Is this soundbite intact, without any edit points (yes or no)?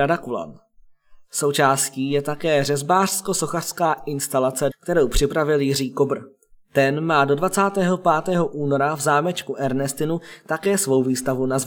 no